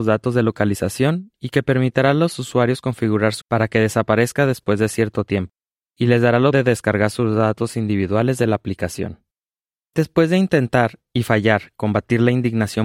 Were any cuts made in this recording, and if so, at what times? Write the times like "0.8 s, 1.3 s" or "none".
3.4 s, 6.5 s